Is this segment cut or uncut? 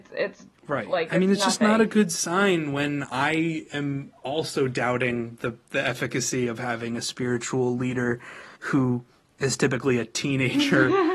cut